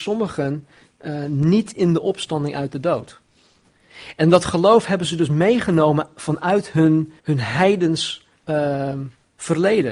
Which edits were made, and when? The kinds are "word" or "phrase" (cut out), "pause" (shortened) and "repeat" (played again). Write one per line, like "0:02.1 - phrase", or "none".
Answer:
0:07.2 - pause
0:08.4 - pause